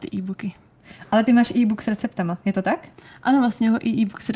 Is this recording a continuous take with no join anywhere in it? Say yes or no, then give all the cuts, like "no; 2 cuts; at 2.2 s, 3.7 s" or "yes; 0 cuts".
yes; 0 cuts